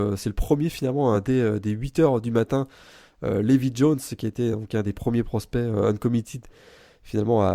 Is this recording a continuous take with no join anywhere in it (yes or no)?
yes